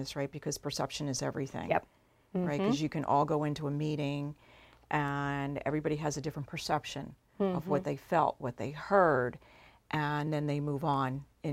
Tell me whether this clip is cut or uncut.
uncut